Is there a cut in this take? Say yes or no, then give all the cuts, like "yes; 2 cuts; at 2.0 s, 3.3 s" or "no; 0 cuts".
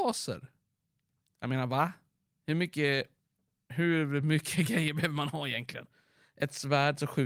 no; 0 cuts